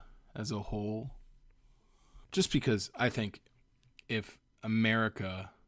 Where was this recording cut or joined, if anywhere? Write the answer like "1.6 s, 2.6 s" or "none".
2.2 s

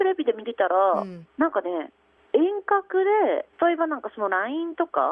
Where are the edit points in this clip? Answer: 1.3 s, 2.2 s, 3.5 s

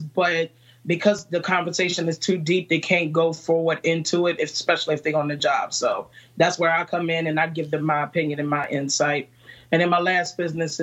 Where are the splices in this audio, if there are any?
none

